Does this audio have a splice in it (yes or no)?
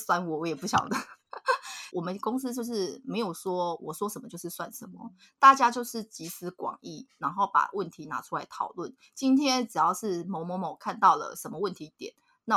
yes